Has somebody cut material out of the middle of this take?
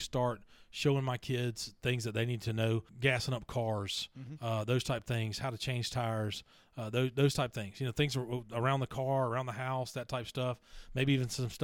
no; 0 cuts

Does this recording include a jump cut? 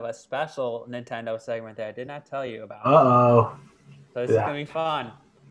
no; 0 cuts

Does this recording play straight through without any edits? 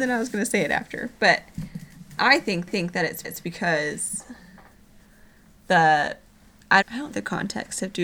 no; 5 cuts; at 2.2 s, 2.7 s, 3.2 s, 6.8 s, 7.1 s

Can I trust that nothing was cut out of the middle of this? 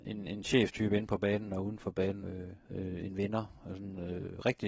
no; 2 cuts; at 2.2 s, 2.6 s

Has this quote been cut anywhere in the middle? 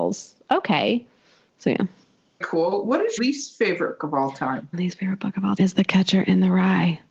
yes; 5 cuts; at 2.4 s, 3.2 s, 4.0 s, 4.7 s, 5.6 s

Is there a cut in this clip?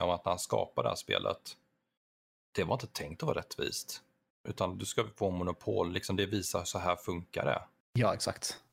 no; 0 cuts

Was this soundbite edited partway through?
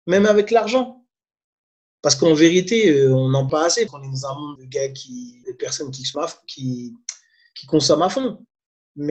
yes; 5 cuts; at 3.5 s, 3.9 s, 4.6 s, 5.4 s, 6.1 s

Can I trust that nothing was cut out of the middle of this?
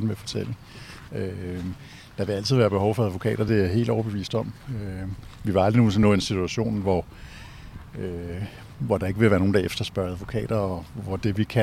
yes; 0 cuts

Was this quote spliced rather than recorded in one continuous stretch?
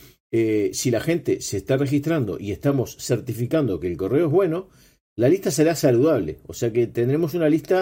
no; 0 cuts

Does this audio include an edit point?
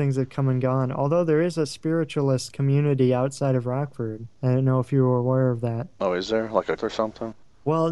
yes; 1 cut; at 6.8 s

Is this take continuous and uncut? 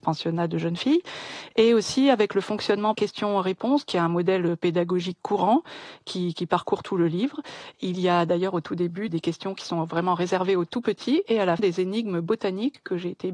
no; 3 cuts; at 2.9 s, 9.1 s, 11.6 s

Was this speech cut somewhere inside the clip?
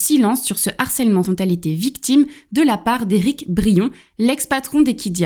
yes; 1 cut; at 1.2 s

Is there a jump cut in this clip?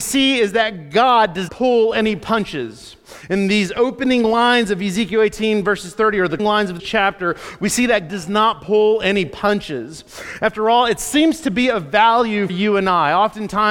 yes; 5 cuts; at 1.5 s, 6.4 s, 6.8 s, 8.1 s, 12.5 s

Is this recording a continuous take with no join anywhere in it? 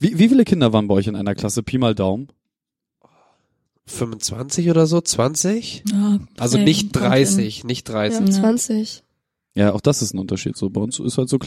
yes; 0 cuts

